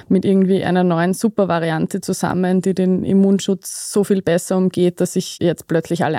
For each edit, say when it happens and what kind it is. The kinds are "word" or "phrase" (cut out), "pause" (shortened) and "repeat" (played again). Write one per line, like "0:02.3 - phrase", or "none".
none